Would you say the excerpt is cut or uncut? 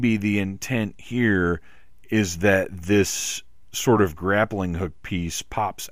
uncut